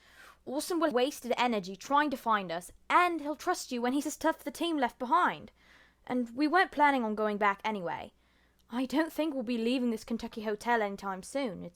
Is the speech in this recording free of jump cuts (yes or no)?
no